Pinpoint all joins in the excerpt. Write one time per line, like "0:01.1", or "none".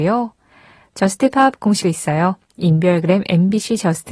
0:01.8